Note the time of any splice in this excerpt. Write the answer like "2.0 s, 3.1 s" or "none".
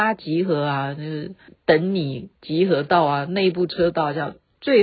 1.5 s